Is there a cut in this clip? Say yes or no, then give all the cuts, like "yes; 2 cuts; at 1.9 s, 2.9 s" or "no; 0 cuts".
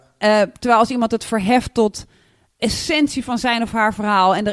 yes; 1 cut; at 2.6 s